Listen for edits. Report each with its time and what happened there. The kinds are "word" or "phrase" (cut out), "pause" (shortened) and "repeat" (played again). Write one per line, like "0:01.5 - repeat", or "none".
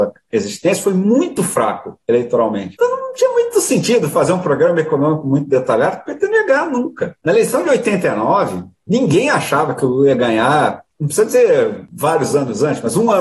none